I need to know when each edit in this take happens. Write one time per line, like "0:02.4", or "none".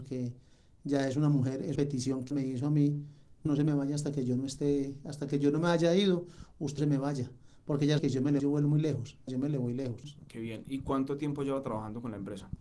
0:01.8
0:02.3
0:03.5
0:06.8
0:08.0
0:08.4
0:09.3